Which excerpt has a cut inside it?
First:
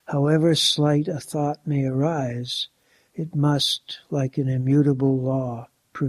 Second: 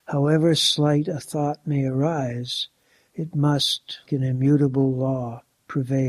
second; 1 cut; at 4.1 s

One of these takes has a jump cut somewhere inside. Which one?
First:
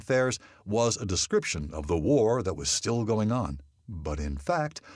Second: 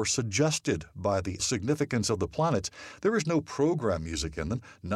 second; 1 cut; at 1.4 s

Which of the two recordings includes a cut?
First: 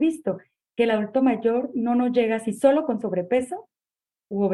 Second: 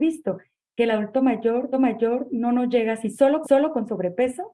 second; 2 cuts; at 1.7 s, 3.4 s

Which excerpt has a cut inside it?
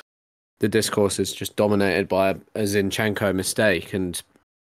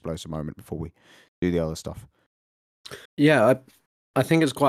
second; 1 cut; at 3.1 s

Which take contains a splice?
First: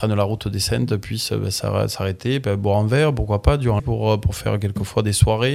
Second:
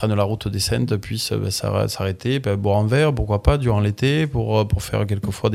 first; 1 cut; at 3.8 s

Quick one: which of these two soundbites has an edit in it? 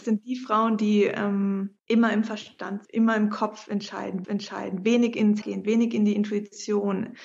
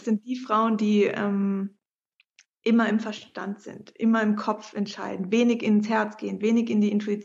first; 4 cuts; at 1.8 s, 2.8 s, 4.2 s, 5.4 s

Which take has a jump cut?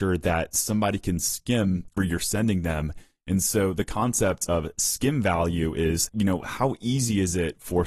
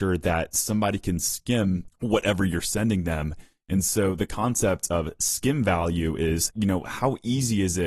first; 1 cut; at 2.0 s

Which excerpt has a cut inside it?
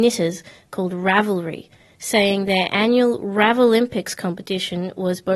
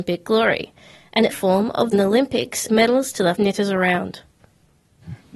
second; 4 cuts; at 1.3 s, 1.9 s, 2.7 s, 3.4 s

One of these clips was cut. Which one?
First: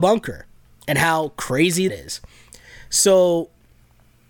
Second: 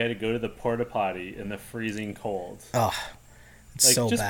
first; 1 cut; at 1.9 s

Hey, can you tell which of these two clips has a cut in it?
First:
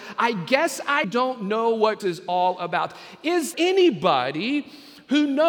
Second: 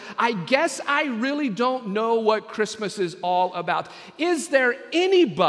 first; 3 cuts; at 1.0 s, 2.0 s, 3.5 s

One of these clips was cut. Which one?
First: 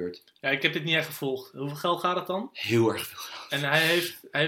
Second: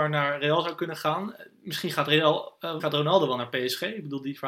second; 1 cut; at 2.8 s

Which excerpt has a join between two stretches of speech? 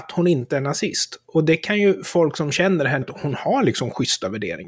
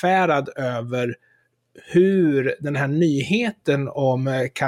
first; 1 cut; at 3.0 s

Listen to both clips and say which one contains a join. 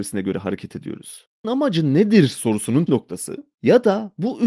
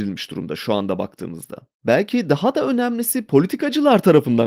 first; 2 cuts; at 1.4 s, 2.9 s

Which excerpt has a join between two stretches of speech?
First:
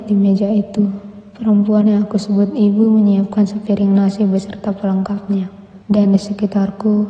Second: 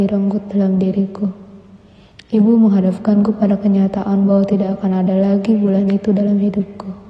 first; 1 cut; at 5.8 s

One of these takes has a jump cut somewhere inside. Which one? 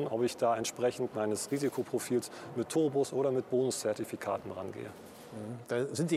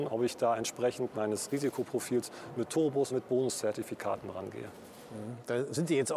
second; 1 cut; at 3.1 s

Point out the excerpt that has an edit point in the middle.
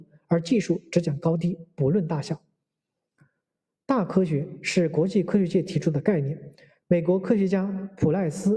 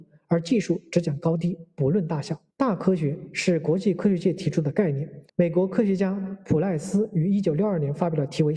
second; 2 cuts; at 2.5 s, 5.3 s

